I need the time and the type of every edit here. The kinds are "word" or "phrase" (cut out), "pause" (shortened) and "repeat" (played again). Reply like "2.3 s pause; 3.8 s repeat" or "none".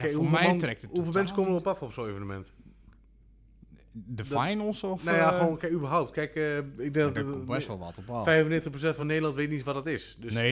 none